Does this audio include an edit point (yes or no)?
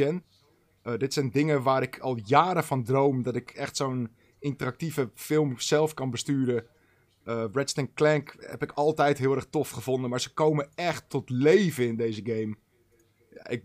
no